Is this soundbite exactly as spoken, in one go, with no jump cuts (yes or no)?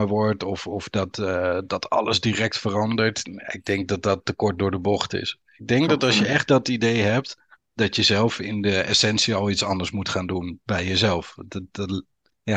yes